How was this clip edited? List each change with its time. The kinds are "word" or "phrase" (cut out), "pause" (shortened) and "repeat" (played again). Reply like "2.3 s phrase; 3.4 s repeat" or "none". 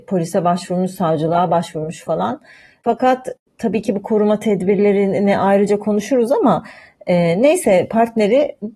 none